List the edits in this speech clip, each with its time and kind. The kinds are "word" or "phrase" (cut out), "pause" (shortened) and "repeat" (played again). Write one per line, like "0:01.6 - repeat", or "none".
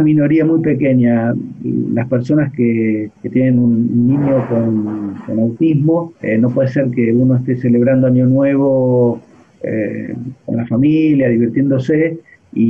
0:03.2 - pause
0:06.2 - pause

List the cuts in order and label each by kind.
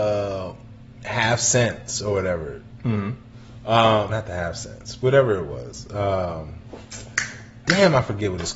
0:04.1 - word

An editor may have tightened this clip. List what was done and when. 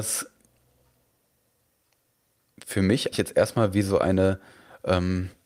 0:03.1 - word

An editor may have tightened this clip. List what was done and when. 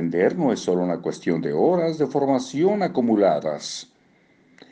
none

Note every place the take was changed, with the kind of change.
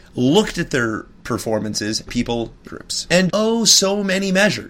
0:02.1 - phrase
0:02.7 - phrase
0:03.3 - word

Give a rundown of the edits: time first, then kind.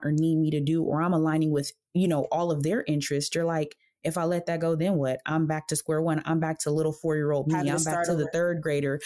none

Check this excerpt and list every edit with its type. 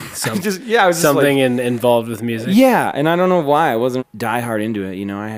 0:04.0 - word

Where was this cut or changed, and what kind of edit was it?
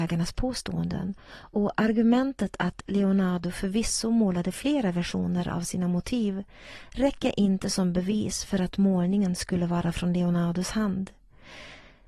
none

